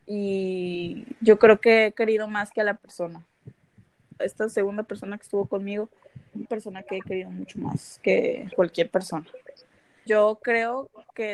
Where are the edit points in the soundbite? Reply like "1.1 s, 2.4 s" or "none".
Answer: 2.8 s, 4.2 s, 6.4 s, 8.5 s, 10.1 s